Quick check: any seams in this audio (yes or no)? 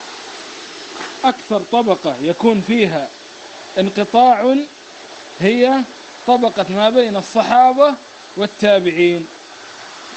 no